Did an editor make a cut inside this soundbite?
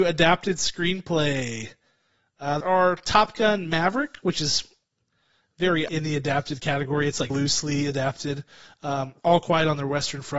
yes; 3 cuts; at 2.6 s, 5.9 s, 7.3 s

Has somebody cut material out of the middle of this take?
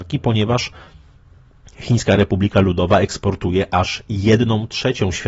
no; 0 cuts

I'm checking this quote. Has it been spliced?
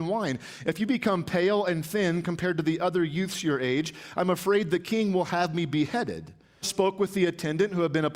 yes; 1 cut; at 6.6 s

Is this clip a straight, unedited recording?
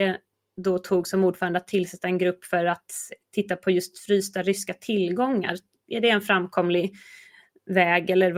yes; 0 cuts

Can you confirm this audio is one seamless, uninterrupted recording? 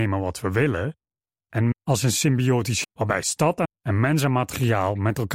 no; 3 cuts; at 1.7 s, 2.8 s, 3.6 s

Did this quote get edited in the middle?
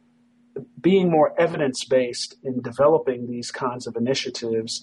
no; 0 cuts

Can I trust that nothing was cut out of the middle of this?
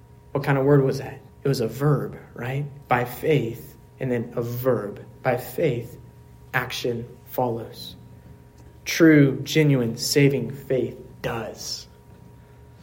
no; 5 cuts; at 1.3 s, 2.8 s, 3.9 s, 7.2 s, 11.1 s

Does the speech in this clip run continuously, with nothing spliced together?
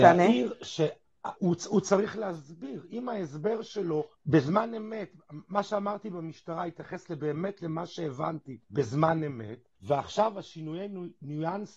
no; 4 cuts; at 1.4 s, 4.1 s, 8.6 s, 9.8 s

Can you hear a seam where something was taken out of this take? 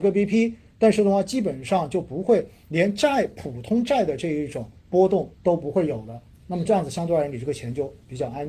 yes; 2 cuts; at 4.8 s, 5.3 s

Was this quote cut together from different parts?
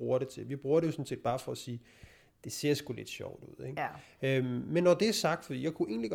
no; 0 cuts

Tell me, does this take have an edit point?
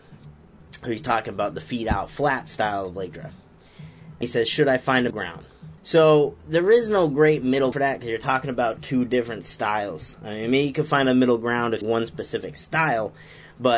yes; 5 cuts; at 4.2 s, 5.1 s, 5.8 s, 7.7 s, 11.8 s

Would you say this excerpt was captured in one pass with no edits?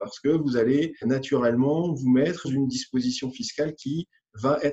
no; 2 cuts; at 1.0 s, 2.4 s

